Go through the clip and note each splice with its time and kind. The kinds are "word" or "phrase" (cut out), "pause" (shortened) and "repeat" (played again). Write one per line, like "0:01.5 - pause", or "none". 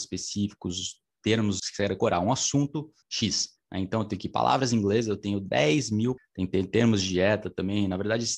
0:01.6 - word
0:03.0 - pause
0:06.2 - phrase